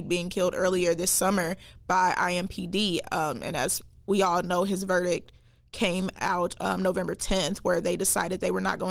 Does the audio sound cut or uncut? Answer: uncut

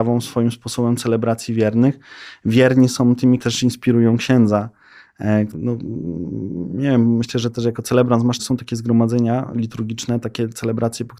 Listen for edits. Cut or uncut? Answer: cut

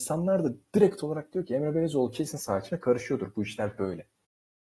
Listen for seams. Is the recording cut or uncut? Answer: uncut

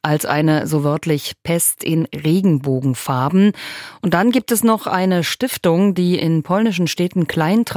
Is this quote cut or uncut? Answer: uncut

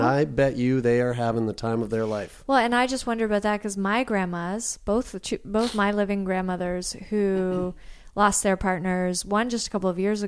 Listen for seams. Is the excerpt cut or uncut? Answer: uncut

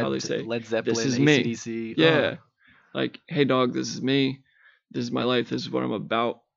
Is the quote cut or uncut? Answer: uncut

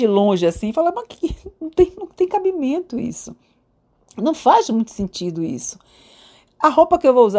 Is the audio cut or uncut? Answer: uncut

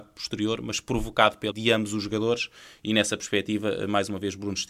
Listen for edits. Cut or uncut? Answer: cut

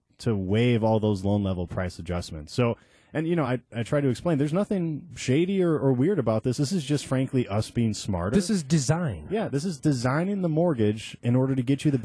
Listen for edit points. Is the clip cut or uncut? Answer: uncut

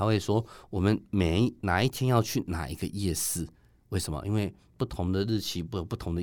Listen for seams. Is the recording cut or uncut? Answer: uncut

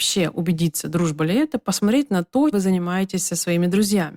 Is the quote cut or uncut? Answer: cut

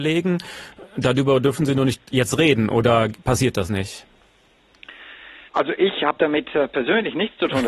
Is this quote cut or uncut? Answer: cut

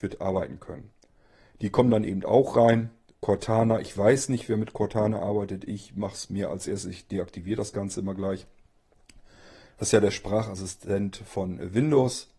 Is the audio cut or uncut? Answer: uncut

